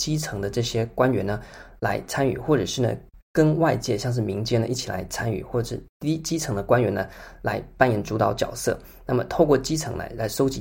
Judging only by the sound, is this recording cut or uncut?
cut